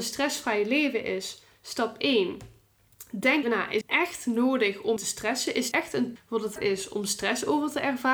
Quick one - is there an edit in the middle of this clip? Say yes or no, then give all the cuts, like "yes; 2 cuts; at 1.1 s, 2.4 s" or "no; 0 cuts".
yes; 6 cuts; at 3.4 s, 3.8 s, 5.0 s, 5.7 s, 6.2 s, 6.6 s